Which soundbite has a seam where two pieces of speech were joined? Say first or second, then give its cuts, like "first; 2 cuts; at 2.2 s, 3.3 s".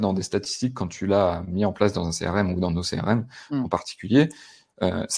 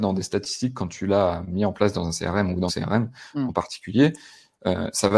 second; 1 cut; at 2.7 s